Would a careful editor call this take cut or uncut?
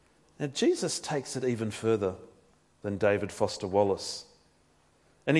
uncut